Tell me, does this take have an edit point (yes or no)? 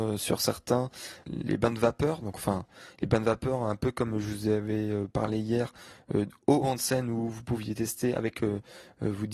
yes